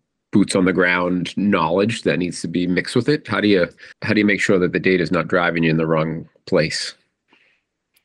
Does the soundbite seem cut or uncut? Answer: cut